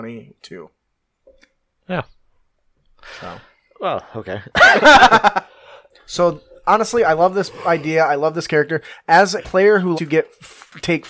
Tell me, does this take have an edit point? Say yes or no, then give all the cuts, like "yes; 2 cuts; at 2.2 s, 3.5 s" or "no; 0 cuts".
yes; 2 cuts; at 9.4 s, 9.9 s